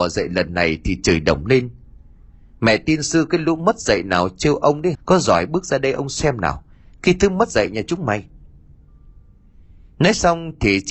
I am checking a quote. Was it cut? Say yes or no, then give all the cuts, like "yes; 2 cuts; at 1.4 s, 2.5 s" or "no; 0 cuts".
yes; 1 cut; at 4.9 s